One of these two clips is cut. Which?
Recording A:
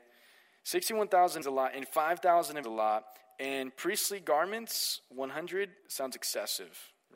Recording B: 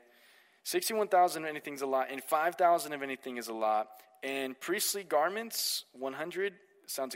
A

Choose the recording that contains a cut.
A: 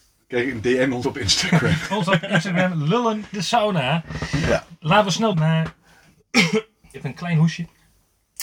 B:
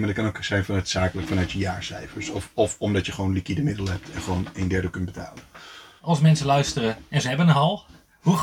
A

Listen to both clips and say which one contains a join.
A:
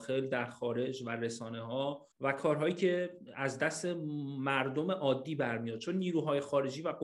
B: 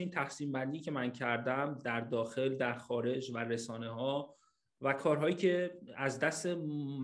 A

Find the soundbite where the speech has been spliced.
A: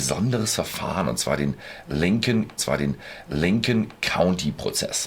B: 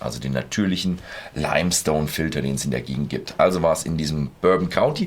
A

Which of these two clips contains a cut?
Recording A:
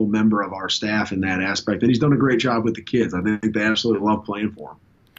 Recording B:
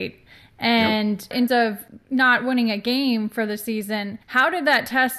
B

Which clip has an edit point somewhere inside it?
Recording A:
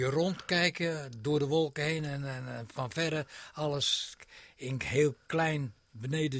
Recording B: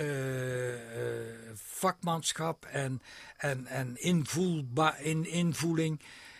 B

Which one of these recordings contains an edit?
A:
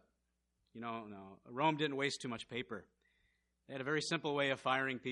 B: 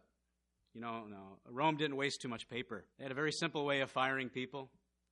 B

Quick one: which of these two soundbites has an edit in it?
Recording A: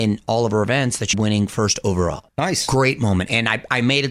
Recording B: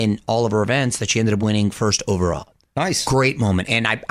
A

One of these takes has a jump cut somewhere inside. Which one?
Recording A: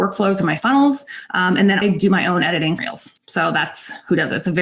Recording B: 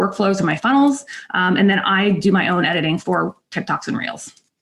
A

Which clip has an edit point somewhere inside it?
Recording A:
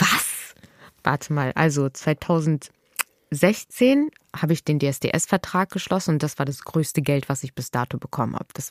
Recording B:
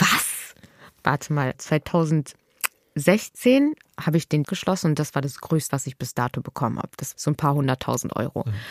B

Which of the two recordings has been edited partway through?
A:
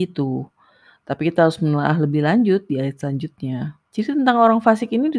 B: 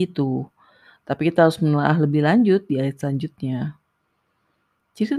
A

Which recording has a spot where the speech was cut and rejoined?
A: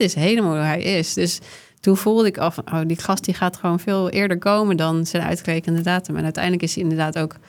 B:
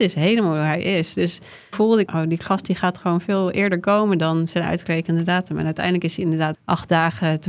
B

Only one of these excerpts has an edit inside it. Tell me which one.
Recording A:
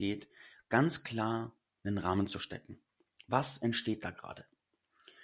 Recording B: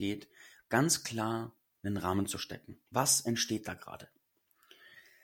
B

